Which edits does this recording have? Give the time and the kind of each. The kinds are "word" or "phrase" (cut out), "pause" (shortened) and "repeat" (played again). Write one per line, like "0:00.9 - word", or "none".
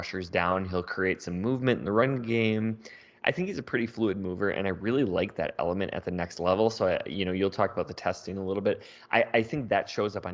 none